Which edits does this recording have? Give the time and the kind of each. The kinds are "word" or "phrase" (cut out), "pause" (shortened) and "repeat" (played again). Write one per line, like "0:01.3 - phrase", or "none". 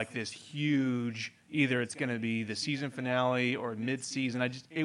0:01.4 - pause